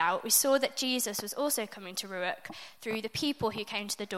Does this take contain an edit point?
no; 0 cuts

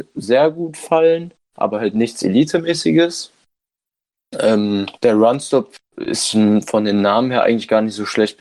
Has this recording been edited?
yes; 2 cuts; at 1.4 s, 5.0 s

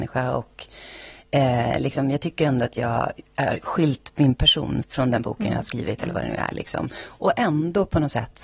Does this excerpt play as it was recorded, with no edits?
no; 2 cuts; at 3.3 s, 4.8 s

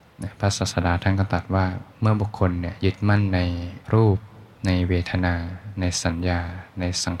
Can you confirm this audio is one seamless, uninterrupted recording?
no; 3 cuts; at 1.9 s, 3.8 s, 4.5 s

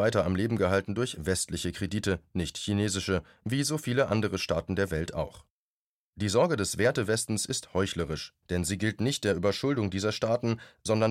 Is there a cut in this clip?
yes; 1 cut; at 8.4 s

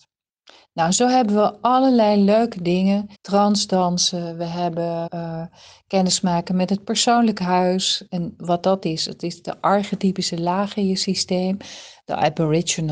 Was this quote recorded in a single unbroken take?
no; 2 cuts; at 3.1 s, 5.1 s

